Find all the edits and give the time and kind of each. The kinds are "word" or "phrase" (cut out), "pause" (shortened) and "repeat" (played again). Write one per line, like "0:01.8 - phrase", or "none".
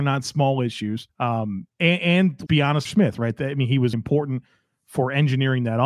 0:01.1 - word
0:01.7 - pause
0:02.5 - word
0:02.9 - phrase
0:03.9 - word